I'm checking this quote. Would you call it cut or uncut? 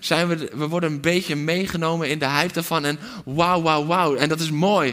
uncut